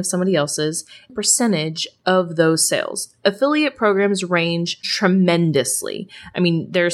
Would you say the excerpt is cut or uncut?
cut